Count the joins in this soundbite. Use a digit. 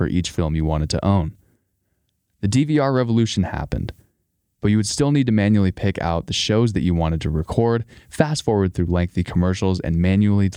0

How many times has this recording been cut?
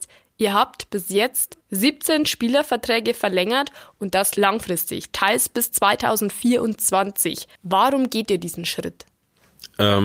2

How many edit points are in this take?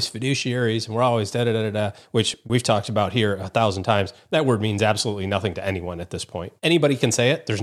1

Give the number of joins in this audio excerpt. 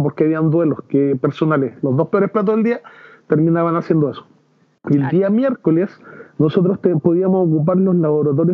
0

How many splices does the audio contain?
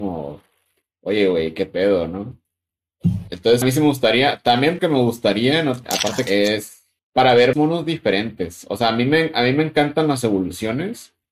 6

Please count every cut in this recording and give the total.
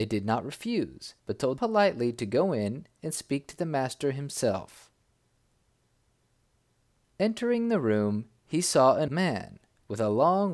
3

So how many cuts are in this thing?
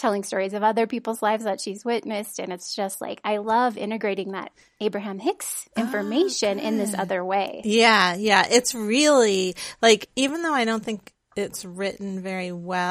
0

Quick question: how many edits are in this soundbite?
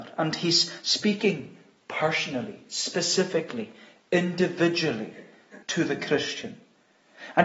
1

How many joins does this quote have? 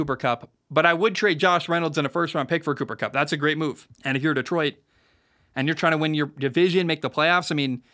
1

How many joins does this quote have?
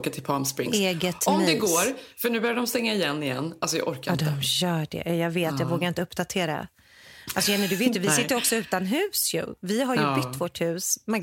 0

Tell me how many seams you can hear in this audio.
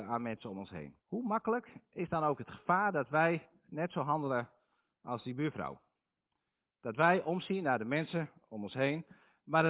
1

